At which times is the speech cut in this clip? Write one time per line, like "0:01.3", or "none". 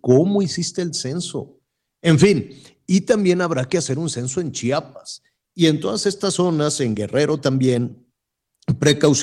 none